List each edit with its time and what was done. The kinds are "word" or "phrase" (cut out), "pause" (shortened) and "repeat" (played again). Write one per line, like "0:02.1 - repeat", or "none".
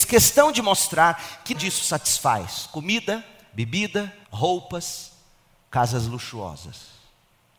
0:01.5 - word
0:04.2 - pause